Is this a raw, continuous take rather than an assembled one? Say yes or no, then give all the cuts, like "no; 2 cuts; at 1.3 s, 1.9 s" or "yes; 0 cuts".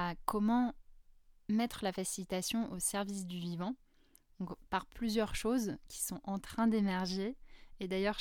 yes; 0 cuts